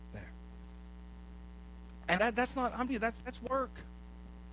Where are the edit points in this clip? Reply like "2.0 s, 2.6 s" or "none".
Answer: 2.2 s, 2.9 s

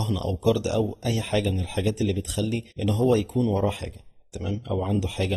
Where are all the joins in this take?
2.7 s

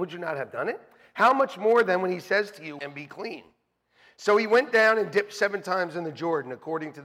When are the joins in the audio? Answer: 2.8 s

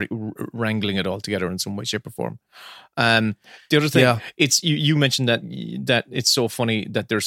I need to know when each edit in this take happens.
none

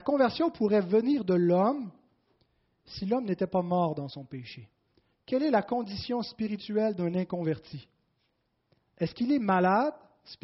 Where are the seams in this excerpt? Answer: none

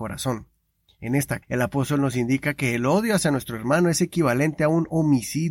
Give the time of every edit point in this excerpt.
1.4 s

